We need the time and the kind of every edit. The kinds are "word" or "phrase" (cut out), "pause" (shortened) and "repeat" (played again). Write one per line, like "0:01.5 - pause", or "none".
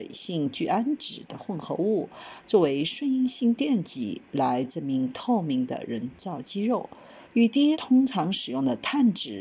0:07.2 - pause
0:07.7 - word